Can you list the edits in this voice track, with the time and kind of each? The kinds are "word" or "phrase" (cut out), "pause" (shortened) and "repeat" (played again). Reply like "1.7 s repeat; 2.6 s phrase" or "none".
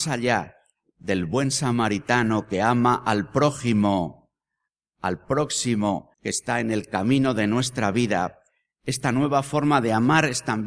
6.1 s pause